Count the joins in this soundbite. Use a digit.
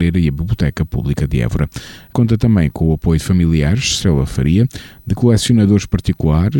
1